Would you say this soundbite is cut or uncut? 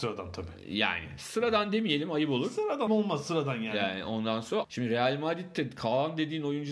cut